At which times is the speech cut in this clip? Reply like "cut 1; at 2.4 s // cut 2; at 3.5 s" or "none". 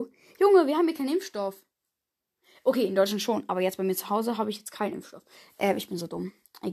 none